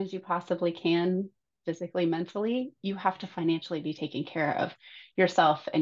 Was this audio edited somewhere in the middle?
no; 0 cuts

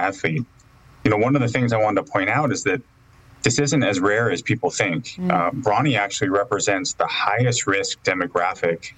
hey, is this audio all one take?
yes; 0 cuts

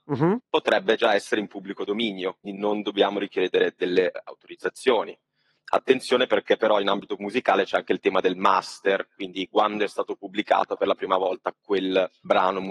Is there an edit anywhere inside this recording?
yes; 1 cut; at 2.4 s

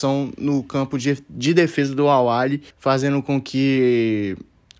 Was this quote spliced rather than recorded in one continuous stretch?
yes; 1 cut; at 2.7 s

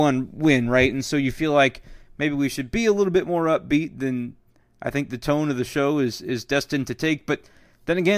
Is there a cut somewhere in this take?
no; 0 cuts

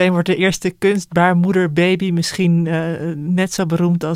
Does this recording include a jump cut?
no; 0 cuts

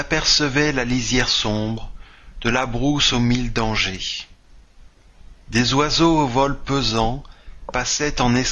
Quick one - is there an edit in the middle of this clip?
no; 0 cuts

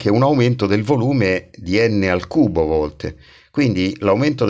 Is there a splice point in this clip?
no; 0 cuts

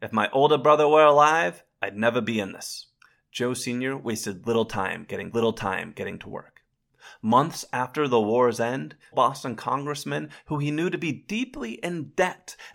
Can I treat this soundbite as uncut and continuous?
no; 3 cuts; at 3.0 s, 5.3 s, 9.1 s

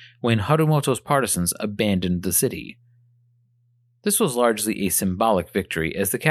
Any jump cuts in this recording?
no; 0 cuts

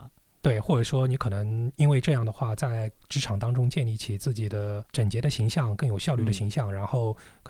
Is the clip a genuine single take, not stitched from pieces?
no; 1 cut; at 4.9 s

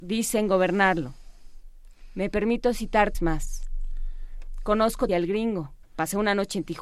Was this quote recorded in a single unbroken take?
no; 3 cuts; at 3.1 s, 5.1 s, 5.8 s

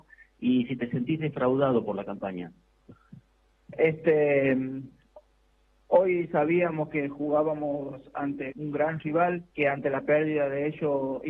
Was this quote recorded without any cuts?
no; 2 cuts; at 8.5 s, 9.5 s

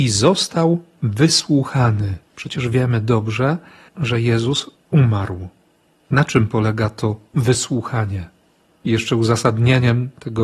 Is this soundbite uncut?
no; 1 cut; at 2.3 s

